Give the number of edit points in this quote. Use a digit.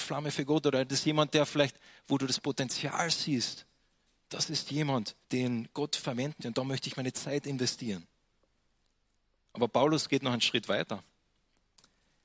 2